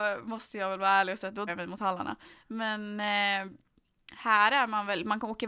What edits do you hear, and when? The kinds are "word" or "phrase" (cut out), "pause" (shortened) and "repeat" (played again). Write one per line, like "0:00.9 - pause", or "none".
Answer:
0:01.5 - word